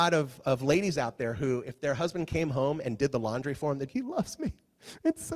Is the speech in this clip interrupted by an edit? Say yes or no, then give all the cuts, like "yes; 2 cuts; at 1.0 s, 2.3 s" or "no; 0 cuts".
yes; 1 cut; at 3.9 s